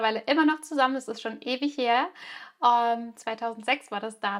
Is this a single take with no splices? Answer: yes; 0 cuts

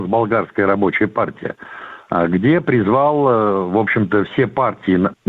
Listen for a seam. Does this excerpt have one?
no; 0 cuts

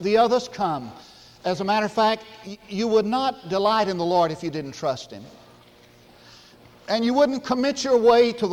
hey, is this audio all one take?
yes; 0 cuts

